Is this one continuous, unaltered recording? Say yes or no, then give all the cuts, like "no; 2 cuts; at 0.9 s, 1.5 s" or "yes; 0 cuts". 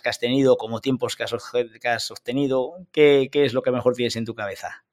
yes; 0 cuts